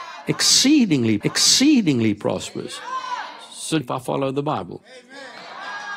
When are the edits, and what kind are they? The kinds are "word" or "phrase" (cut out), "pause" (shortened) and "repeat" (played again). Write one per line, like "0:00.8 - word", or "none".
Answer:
0:01.2 - repeat
0:03.8 - phrase